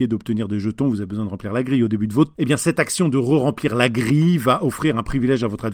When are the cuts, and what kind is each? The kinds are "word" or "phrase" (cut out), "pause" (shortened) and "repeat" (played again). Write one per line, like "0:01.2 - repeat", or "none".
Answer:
0:02.3 - word